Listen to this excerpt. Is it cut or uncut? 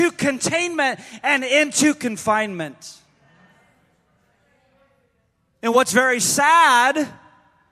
uncut